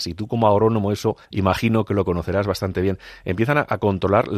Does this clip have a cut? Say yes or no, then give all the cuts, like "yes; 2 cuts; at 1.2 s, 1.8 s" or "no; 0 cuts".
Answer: yes; 1 cut; at 1.2 s